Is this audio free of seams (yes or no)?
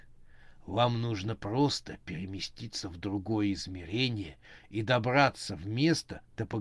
yes